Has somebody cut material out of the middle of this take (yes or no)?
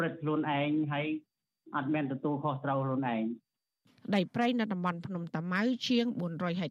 no